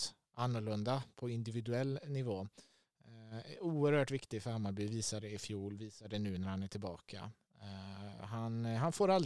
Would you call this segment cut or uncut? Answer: uncut